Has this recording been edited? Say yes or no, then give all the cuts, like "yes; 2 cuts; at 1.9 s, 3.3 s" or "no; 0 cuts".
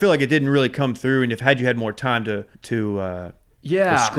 yes; 1 cut; at 2.5 s